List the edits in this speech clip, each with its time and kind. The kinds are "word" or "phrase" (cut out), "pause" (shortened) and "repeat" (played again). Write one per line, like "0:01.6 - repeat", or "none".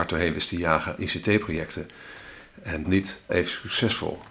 0:01.0 - word
0:02.8 - word
0:03.3 - word